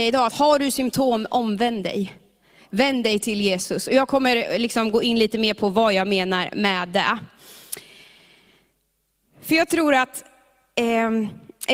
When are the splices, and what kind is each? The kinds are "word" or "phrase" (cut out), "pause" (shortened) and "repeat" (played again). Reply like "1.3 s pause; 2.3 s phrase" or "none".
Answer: none